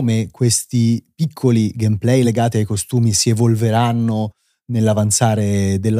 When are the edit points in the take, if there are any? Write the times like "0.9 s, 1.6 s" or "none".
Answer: none